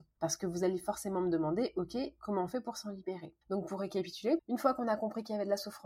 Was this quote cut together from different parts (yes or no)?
yes